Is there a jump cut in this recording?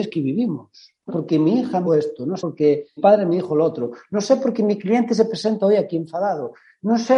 yes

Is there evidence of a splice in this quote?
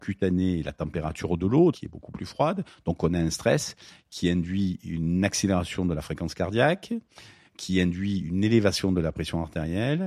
yes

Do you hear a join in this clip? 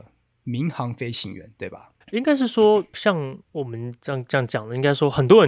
yes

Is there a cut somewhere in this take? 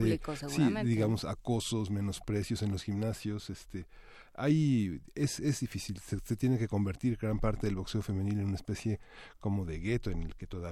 no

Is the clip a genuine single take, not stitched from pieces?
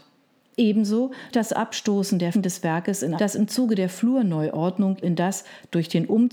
no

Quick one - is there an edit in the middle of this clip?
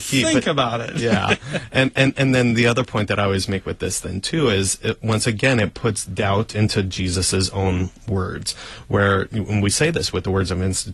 no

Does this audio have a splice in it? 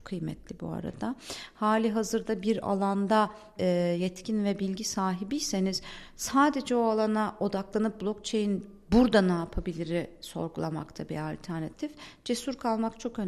yes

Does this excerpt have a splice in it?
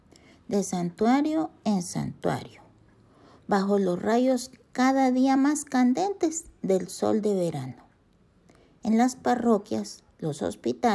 no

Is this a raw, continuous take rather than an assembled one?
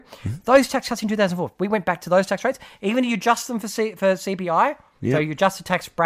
yes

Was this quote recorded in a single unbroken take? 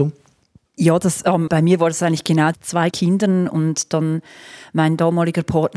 no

